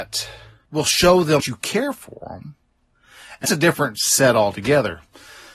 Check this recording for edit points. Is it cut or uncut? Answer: cut